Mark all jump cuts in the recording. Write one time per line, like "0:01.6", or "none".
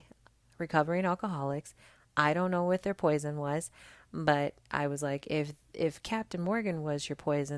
none